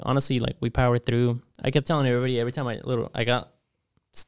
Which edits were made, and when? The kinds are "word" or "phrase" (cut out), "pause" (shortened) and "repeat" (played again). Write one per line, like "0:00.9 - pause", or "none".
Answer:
none